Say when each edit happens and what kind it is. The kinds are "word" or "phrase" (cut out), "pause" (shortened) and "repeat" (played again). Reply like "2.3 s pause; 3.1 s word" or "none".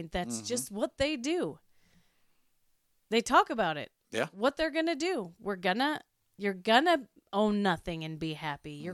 none